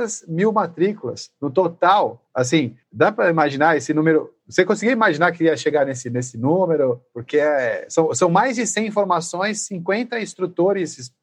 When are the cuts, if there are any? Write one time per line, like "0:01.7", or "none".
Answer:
none